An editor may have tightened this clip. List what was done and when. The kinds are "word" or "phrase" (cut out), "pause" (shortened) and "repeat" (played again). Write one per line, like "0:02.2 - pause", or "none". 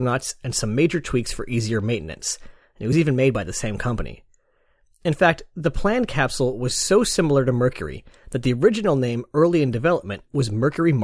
none